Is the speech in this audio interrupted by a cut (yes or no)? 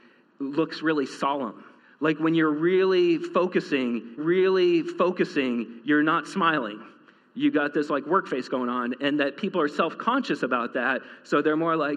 yes